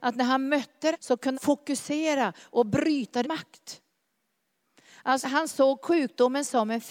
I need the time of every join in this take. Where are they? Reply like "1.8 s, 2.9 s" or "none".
0.9 s, 1.3 s, 3.2 s, 5.2 s